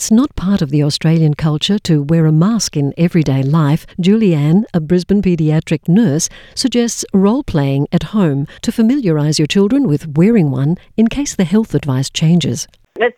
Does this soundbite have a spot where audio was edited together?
yes; 2 cuts; at 3.9 s, 8.6 s

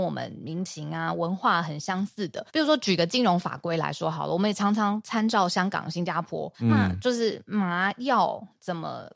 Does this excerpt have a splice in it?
yes; 2 cuts; at 2.5 s, 6.5 s

